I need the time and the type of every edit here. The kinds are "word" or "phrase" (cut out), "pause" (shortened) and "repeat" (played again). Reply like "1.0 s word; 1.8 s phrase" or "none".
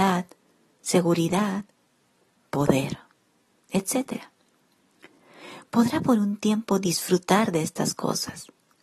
none